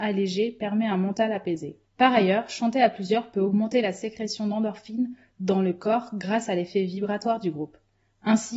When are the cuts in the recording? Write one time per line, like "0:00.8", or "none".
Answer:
0:01.9